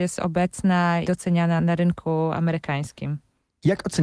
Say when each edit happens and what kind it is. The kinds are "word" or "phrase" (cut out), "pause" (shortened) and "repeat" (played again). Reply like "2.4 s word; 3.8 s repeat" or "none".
1.0 s word; 1.6 s word